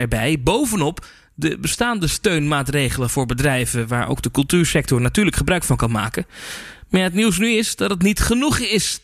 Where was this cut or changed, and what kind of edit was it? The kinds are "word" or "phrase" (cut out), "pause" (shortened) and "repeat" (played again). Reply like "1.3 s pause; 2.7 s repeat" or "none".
none